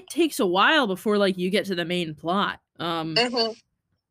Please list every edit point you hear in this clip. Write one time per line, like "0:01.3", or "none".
0:02.7